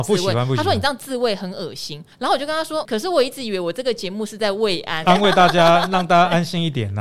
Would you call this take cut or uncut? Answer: cut